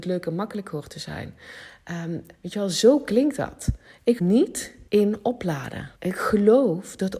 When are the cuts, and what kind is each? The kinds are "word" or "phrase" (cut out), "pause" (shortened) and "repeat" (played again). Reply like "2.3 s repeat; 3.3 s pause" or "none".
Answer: 2.3 s pause; 4.2 s word; 4.9 s pause; 6.0 s pause